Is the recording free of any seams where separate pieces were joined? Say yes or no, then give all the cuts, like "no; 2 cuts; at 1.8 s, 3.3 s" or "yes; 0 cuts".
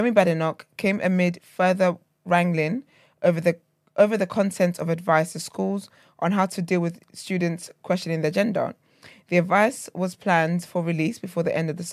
yes; 0 cuts